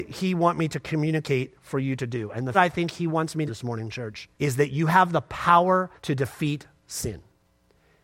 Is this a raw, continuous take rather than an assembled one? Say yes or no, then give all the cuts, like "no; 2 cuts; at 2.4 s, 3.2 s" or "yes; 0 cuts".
no; 4 cuts; at 2.5 s, 3.5 s, 4.3 s, 6.0 s